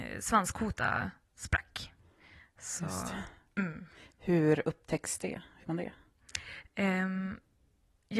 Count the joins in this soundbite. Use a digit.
1